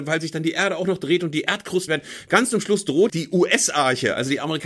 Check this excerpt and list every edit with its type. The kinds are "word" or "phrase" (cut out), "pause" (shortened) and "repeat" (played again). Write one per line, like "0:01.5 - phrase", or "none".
0:01.9 - word
0:03.1 - word